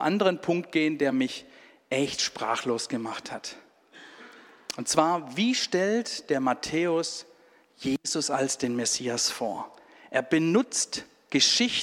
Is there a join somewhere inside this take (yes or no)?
no